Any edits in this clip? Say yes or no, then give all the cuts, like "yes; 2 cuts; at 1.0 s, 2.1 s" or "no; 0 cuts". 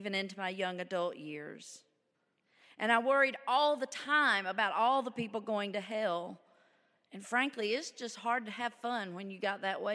no; 0 cuts